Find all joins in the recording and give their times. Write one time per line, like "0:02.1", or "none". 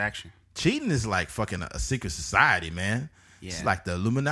none